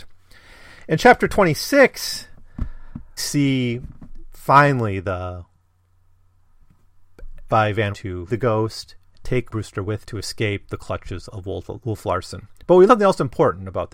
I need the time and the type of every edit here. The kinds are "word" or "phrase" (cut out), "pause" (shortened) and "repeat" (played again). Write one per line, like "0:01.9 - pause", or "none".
0:03.2 - word
0:07.5 - word
0:07.9 - word
0:08.3 - word
0:09.5 - word
0:10.0 - word
0:11.3 - word
0:12.9 - word